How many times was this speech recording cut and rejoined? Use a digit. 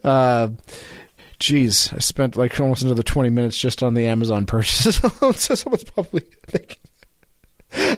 1